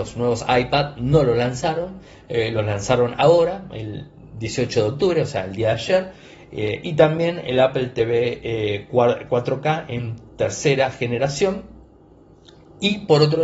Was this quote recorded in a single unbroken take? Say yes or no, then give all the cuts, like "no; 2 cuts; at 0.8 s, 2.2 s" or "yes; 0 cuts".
yes; 0 cuts